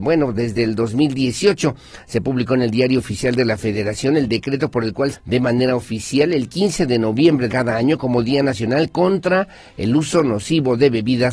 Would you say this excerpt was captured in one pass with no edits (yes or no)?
no